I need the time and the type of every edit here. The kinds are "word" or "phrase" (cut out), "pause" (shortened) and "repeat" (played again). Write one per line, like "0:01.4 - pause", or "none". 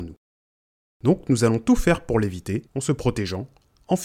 0:02.7 - pause